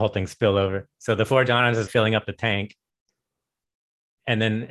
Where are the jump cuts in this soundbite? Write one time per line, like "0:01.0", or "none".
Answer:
0:00.9
0:01.9